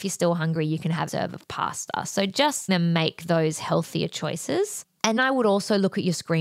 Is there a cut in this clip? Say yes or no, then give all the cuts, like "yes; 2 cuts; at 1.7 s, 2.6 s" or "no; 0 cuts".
yes; 3 cuts; at 1.1 s, 2.7 s, 5.2 s